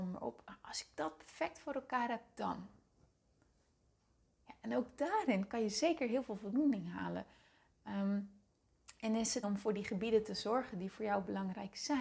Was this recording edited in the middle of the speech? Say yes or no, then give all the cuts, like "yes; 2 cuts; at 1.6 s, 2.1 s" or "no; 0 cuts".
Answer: yes; 1 cut; at 9.4 s